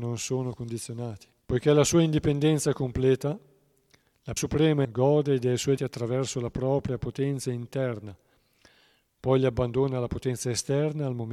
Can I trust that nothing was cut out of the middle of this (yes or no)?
no